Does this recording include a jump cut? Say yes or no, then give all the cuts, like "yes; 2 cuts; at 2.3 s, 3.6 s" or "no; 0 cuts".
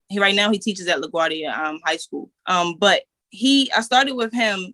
yes; 1 cut; at 2.4 s